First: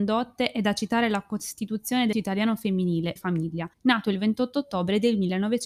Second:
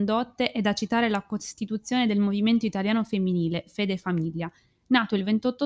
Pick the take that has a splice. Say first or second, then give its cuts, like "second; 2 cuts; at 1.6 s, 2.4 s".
first; 3 cuts; at 2.1 s, 3.2 s, 3.7 s